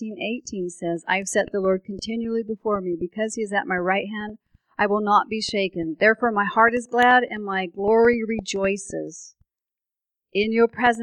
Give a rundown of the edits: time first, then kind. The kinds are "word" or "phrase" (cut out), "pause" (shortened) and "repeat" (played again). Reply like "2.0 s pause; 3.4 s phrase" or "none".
none